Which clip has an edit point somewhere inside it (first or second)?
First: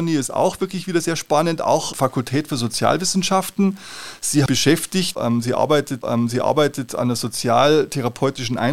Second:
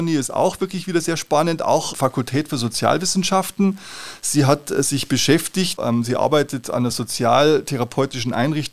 first